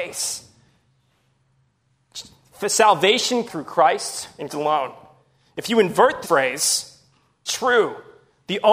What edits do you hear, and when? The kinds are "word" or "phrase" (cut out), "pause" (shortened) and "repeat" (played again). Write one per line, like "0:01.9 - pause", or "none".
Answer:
0:03.5 - word
0:04.5 - word
0:06.2 - word
0:07.5 - word